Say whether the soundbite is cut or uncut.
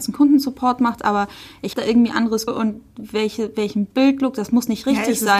cut